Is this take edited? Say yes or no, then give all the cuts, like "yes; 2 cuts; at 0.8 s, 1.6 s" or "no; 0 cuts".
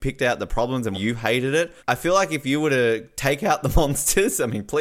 yes; 2 cuts; at 0.9 s, 1.8 s